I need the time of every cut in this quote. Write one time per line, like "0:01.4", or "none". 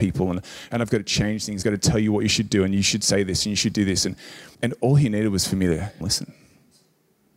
0:01.6
0:04.5
0:06.0